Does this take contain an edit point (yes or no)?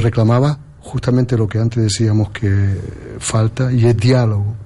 no